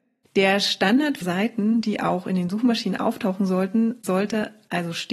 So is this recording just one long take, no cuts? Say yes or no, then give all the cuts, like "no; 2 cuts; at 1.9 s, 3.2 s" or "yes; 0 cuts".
no; 1 cut; at 1.2 s